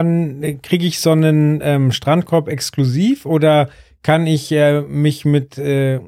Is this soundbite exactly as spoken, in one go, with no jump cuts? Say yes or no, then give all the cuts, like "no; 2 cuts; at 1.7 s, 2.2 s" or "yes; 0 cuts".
yes; 0 cuts